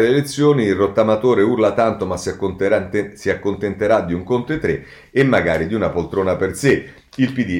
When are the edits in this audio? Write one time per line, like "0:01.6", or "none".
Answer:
none

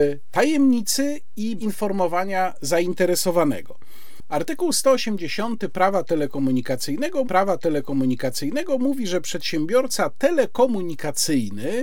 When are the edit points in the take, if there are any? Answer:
0:01.6
0:07.2

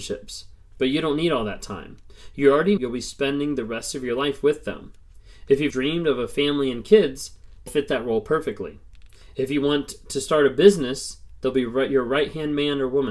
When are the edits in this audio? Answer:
0:02.8
0:05.7
0:07.7

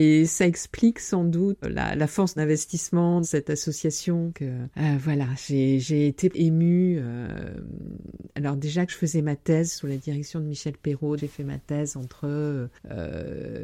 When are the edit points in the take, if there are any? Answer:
0:01.6
0:02.4
0:03.2
0:04.3
0:06.3
0:08.9
0:11.2

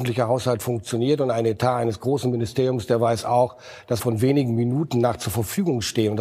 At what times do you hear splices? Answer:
0:04.0

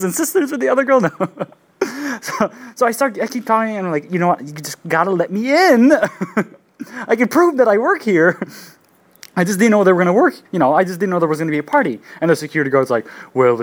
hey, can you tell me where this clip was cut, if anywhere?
0:10.5

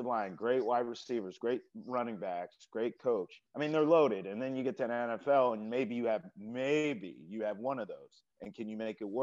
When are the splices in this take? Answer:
0:03.5
0:08.3

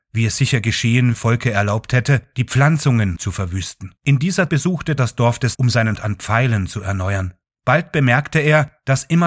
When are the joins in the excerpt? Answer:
0:01.1
0:03.2
0:04.0
0:04.5
0:05.0
0:05.5
0:06.0

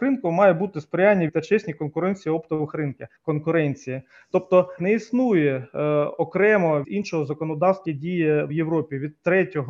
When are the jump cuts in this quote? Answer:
0:01.3
0:02.7
0:03.2
0:04.8
0:06.8
0:07.9
0:08.5

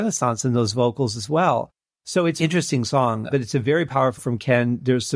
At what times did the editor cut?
0:02.4
0:03.3
0:04.2

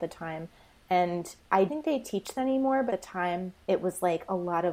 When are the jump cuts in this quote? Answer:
0:01.7
0:02.4
0:02.9
0:03.6

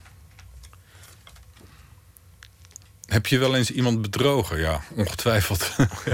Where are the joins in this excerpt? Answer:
none

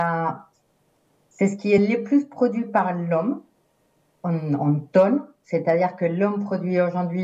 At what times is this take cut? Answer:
none

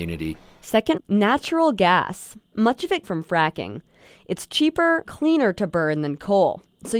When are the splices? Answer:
0:01.0
0:03.0
0:05.1

